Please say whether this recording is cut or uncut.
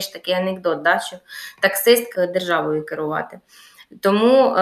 cut